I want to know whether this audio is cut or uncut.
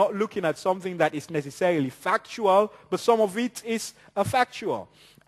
uncut